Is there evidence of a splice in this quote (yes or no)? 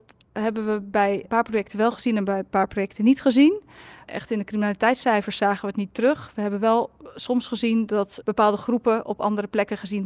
yes